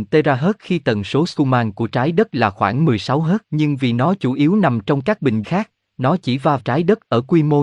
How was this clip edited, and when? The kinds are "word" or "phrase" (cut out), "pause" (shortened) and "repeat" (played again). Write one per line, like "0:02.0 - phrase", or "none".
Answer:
0:03.4 - pause
0:05.4 - word
0:06.6 - word